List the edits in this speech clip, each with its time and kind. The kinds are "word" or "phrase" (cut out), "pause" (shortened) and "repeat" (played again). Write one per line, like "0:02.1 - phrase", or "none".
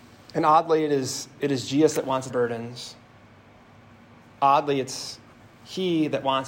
0:02.3 - phrase